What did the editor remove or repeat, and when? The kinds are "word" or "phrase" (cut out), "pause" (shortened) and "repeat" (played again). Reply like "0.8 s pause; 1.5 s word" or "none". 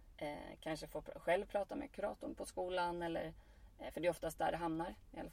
none

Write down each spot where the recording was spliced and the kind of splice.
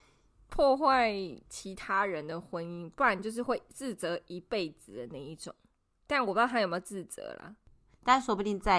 1.5 s pause

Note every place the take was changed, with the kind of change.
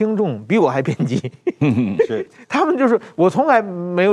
2.3 s word

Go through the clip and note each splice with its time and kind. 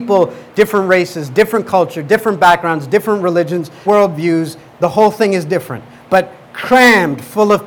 3.9 s word

